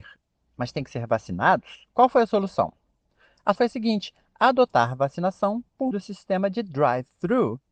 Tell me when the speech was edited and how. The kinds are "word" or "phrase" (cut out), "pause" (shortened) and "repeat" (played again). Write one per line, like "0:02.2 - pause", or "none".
0:03.6 - word
0:05.9 - word